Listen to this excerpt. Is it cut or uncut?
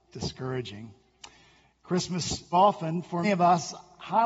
cut